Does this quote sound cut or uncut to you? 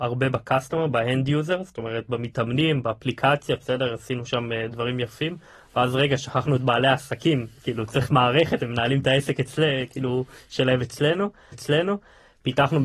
cut